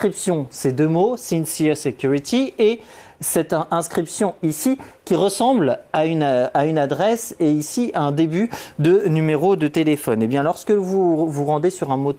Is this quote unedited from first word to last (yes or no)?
yes